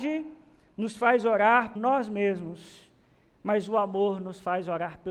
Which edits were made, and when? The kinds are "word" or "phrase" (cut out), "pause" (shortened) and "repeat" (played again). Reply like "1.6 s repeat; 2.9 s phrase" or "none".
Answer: 1.8 s word

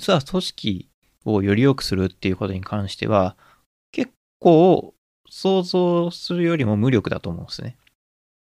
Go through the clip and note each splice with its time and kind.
none

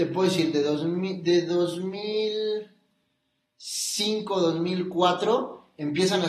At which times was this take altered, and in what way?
none

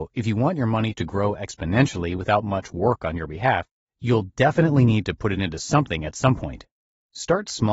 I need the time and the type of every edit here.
none

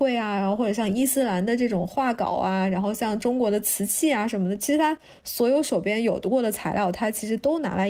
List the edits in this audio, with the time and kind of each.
none

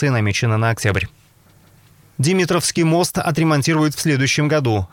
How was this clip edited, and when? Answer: none

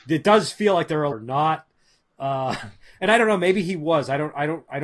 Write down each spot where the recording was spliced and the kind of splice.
1.1 s phrase

